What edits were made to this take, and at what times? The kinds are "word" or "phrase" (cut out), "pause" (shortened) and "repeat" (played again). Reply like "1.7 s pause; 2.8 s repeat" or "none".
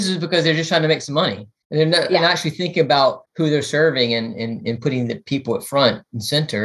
none